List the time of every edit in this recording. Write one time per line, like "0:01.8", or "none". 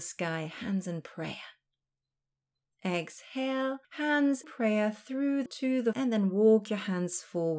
0:04.4
0:05.5
0:05.9